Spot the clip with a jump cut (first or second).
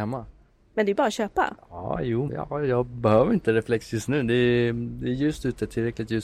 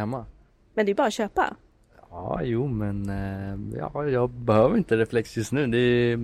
first